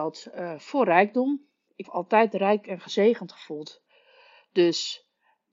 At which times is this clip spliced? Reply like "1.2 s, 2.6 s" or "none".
1.8 s